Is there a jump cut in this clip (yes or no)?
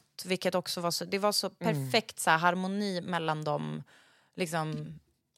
no